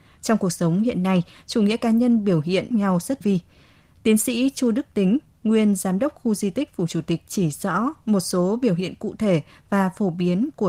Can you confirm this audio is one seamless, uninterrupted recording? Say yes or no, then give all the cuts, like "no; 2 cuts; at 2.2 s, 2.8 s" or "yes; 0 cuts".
no; 2 cuts; at 2.7 s, 3.2 s